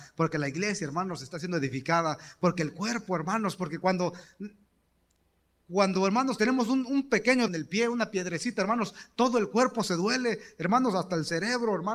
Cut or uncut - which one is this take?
cut